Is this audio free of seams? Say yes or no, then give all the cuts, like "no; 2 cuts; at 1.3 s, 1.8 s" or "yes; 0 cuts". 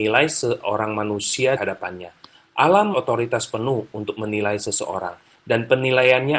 no; 2 cuts; at 1.6 s, 2.9 s